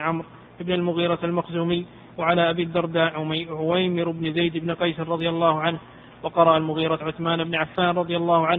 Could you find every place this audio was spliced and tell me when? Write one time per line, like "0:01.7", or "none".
0:07.0

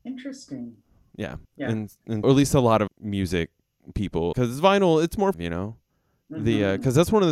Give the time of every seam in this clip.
0:01.4
0:02.2
0:02.9
0:04.3
0:05.3

